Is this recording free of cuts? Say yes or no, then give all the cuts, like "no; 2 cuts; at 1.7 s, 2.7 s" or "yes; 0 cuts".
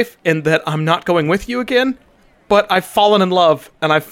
yes; 0 cuts